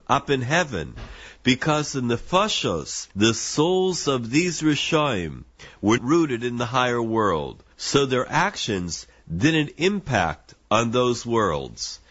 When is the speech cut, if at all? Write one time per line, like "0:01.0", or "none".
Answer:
0:03.1
0:06.0
0:07.7